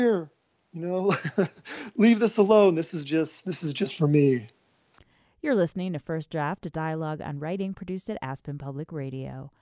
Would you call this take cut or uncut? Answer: uncut